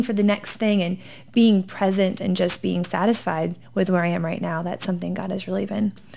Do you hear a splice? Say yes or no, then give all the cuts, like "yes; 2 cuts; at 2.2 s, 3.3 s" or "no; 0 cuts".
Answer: no; 0 cuts